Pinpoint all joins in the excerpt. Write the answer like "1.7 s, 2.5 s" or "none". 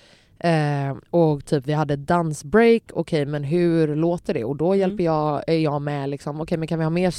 1.1 s

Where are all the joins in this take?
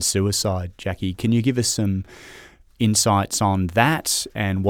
none

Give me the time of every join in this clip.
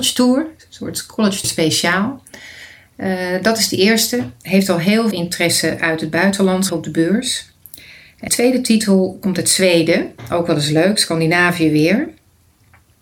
1.4 s, 5.1 s, 6.7 s, 8.3 s

